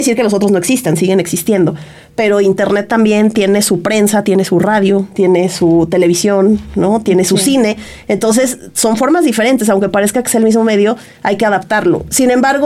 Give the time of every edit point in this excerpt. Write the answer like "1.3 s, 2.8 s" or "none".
none